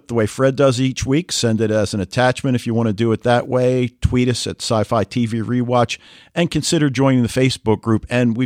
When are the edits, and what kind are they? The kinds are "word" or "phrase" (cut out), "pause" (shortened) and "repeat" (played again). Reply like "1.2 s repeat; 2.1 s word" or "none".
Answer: none